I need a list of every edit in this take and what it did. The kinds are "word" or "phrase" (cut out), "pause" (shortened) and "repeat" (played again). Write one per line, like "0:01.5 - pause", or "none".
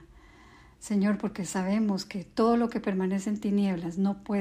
none